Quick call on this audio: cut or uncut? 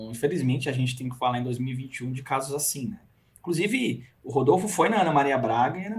uncut